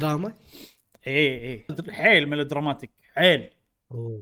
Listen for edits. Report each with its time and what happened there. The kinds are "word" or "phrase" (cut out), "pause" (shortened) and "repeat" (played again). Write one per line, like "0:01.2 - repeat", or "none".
0:01.7 - word